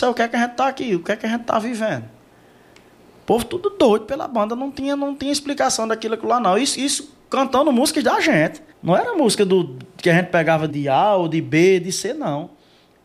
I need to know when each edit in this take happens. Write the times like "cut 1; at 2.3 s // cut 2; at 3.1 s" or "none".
cut 1; at 8.7 s // cut 2; at 10.7 s